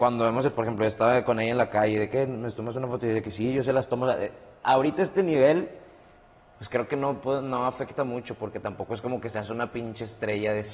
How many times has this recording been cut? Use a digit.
0